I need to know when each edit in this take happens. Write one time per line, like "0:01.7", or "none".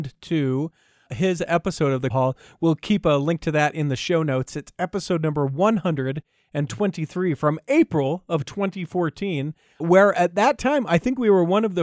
0:01.1
0:02.1
0:09.8